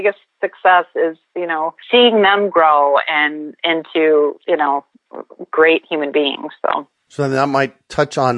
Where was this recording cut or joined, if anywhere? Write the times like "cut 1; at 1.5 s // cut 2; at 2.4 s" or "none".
cut 1; at 1.8 s